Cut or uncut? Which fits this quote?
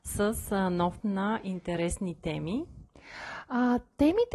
cut